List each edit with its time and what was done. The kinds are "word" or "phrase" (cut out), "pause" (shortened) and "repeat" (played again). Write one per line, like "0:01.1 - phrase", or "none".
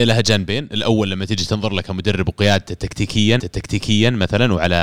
0:03.4 - repeat